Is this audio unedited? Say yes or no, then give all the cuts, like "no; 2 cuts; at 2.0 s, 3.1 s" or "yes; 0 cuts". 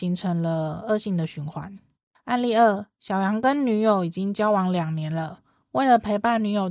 no; 2 cuts; at 1.9 s, 2.9 s